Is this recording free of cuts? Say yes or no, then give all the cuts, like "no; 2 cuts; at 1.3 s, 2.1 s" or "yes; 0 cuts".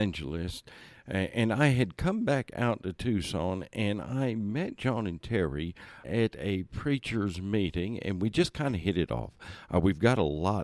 yes; 0 cuts